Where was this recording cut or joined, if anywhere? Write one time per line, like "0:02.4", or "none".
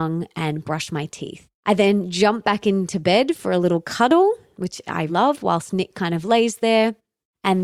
0:01.6
0:05.1